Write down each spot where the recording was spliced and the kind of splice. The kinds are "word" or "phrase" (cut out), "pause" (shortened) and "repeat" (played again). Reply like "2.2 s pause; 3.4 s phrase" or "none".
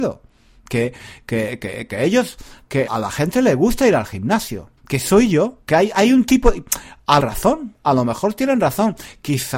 2.9 s word; 4.8 s pause; 5.6 s pause; 7.2 s phrase